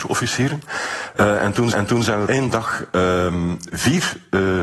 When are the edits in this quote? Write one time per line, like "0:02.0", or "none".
0:01.7
0:02.3